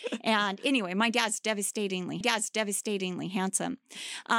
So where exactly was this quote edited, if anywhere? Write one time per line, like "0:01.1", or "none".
0:02.2